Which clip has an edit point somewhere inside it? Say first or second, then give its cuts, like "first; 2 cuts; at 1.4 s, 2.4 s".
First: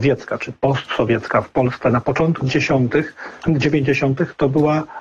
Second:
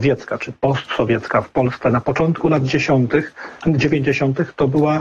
first; 1 cut; at 2.4 s